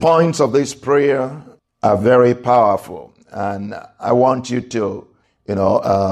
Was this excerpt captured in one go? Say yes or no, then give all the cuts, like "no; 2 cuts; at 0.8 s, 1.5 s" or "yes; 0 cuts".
yes; 0 cuts